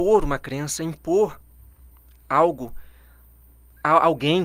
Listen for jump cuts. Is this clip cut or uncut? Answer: uncut